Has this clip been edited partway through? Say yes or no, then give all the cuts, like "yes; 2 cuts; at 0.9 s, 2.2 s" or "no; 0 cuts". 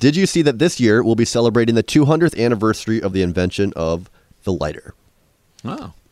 no; 0 cuts